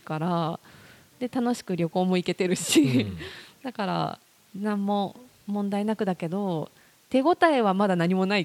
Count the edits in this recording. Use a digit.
0